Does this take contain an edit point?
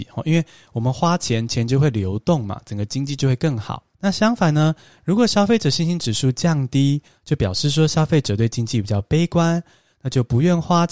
yes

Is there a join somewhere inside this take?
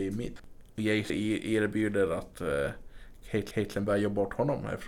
yes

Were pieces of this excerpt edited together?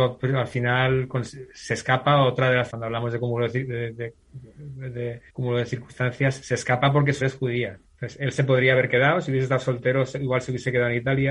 yes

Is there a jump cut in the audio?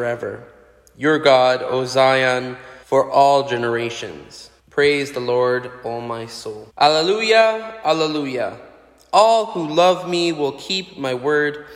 yes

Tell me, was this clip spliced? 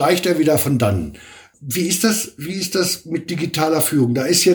no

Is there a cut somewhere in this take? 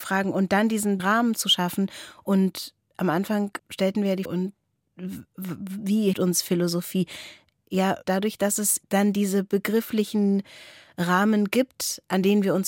yes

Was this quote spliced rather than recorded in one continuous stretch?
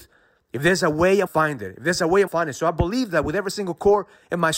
yes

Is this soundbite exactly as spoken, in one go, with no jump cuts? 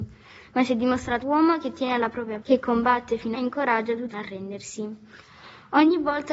no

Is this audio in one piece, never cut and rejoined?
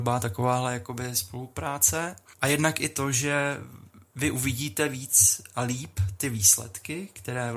yes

